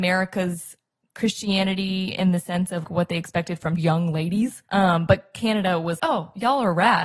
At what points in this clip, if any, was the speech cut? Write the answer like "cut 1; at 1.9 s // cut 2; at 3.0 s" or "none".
cut 1; at 2.8 s // cut 2; at 3.8 s // cut 3; at 4.7 s // cut 4; at 6.0 s